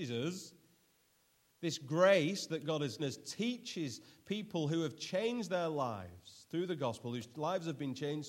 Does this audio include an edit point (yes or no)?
yes